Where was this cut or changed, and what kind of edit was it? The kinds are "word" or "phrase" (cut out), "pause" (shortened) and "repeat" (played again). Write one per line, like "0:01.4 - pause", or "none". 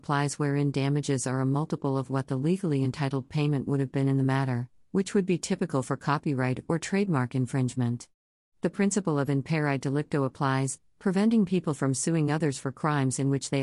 none